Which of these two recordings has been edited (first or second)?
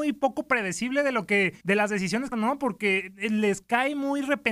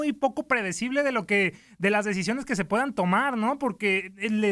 first